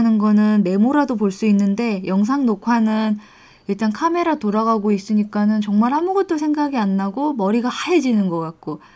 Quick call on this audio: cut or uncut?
uncut